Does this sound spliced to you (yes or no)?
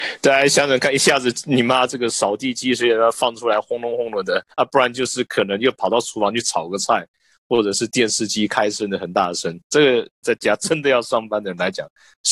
yes